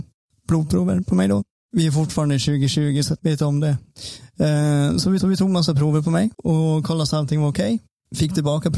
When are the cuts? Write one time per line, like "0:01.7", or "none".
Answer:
0:03.2
0:05.2
0:06.3